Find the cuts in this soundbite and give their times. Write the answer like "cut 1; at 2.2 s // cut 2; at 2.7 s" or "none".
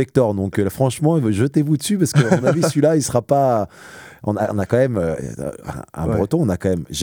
none

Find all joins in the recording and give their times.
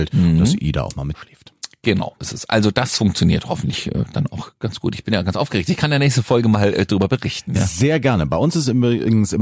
cut 1; at 1.1 s // cut 2; at 2.2 s

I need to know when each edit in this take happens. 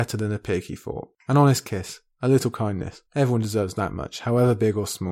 cut 1; at 3.1 s

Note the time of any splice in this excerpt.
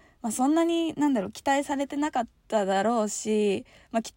cut 1; at 2.4 s

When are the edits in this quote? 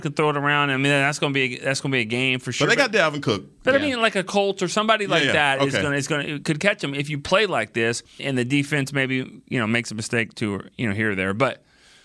cut 1; at 8.2 s

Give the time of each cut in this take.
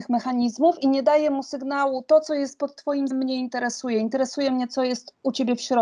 cut 1; at 3.1 s

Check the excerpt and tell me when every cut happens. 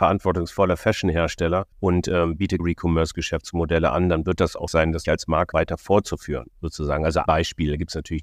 cut 1; at 1.7 s // cut 2; at 2.6 s // cut 3; at 4.7 s // cut 4; at 5.0 s // cut 5; at 5.5 s // cut 6; at 6.5 s // cut 7; at 7.3 s

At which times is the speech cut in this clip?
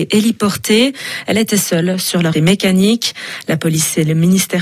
cut 1; at 2.3 s

